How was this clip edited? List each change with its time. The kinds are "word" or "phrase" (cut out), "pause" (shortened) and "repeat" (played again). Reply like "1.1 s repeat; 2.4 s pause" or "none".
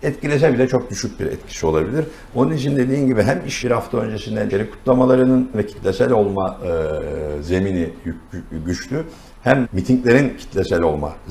3.6 s word; 4.5 s word; 5.5 s word; 9.6 s word

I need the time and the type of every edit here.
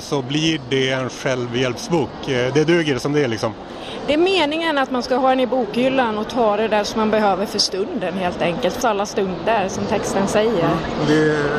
8.8 s word

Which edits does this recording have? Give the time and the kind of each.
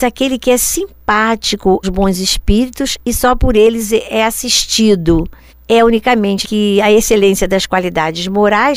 1.8 s word; 5.5 s pause; 6.4 s phrase

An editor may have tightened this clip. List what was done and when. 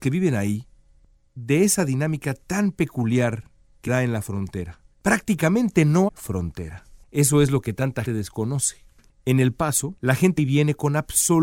3.9 s word; 4.9 s pause; 6.1 s word; 7.0 s pause; 8.1 s word; 10.4 s word

